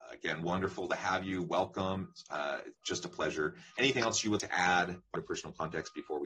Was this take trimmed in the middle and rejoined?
yes; 3 cuts; at 2.7 s, 4.4 s, 5.1 s

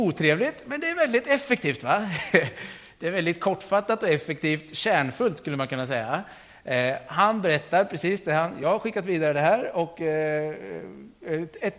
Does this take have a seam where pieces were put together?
no; 0 cuts

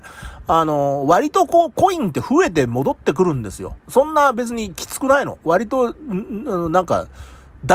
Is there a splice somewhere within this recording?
yes; 1 cut; at 3.8 s

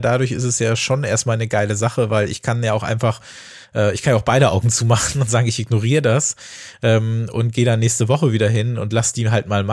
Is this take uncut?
yes; 0 cuts

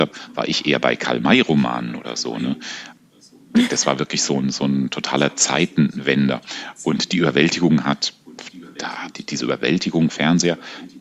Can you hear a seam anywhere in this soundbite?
yes; 2 cuts; at 9.1 s, 10.1 s

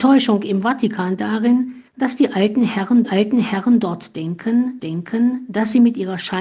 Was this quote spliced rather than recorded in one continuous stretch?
yes; 4 cuts; at 1.2 s, 1.9 s, 3.0 s, 4.8 s

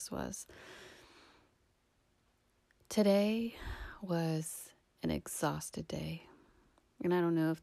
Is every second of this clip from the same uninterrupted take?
yes; 0 cuts

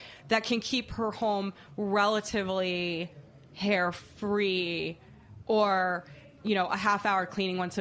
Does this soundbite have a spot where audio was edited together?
no; 0 cuts

